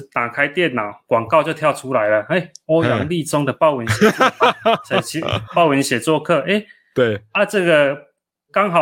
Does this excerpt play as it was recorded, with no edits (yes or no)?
yes